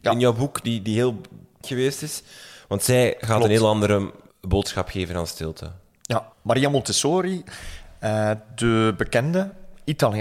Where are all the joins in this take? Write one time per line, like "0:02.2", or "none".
0:01.6
0:04.3
0:06.3